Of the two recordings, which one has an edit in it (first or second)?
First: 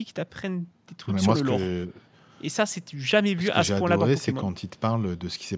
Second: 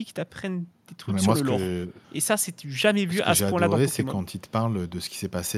second